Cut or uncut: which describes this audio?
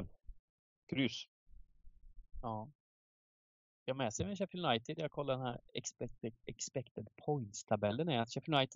uncut